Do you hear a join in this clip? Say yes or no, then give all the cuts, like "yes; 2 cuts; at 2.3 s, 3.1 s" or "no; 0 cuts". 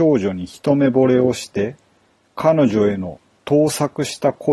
no; 0 cuts